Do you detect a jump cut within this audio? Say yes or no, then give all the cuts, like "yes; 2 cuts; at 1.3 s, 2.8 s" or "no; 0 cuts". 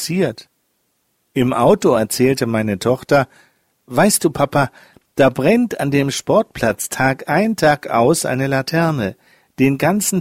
no; 0 cuts